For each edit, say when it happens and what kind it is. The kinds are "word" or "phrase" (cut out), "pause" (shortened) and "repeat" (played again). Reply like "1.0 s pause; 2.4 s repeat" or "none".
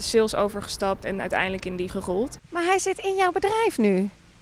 1.9 s word